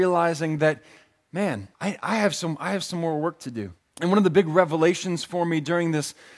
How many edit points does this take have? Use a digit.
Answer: 2